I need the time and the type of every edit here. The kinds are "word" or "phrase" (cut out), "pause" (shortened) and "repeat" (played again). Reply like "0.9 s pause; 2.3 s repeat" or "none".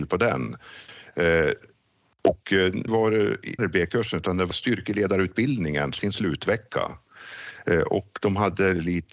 2.9 s word; 3.6 s word; 4.5 s word; 6.0 s word